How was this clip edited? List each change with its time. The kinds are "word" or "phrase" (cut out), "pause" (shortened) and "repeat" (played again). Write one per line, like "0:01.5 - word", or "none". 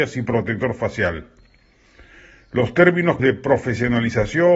0:03.2 - word